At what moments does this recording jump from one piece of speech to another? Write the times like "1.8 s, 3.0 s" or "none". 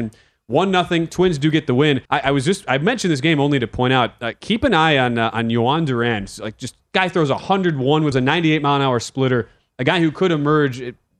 2.1 s, 8.1 s